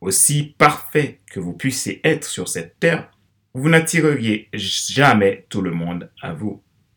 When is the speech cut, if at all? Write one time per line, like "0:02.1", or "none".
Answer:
0:01.2
0:03.3